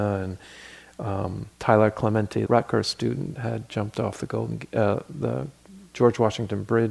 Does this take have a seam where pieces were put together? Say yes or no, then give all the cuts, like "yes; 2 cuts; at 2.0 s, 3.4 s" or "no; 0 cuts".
yes; 2 cuts; at 1.5 s, 2.5 s